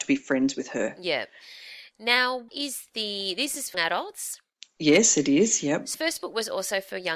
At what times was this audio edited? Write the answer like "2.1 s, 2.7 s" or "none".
2.5 s, 3.7 s, 5.9 s